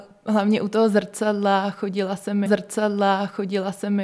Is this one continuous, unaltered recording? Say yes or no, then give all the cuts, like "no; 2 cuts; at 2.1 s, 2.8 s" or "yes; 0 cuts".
no; 1 cut; at 2.5 s